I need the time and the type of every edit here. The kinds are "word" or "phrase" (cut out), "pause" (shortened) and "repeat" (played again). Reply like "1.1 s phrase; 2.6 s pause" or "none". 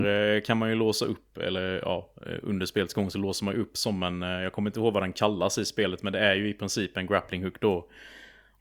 none